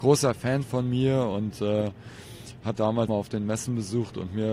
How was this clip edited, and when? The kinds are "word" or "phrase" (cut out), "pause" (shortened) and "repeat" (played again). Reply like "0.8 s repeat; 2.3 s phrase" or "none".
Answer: 2.8 s word; 3.1 s word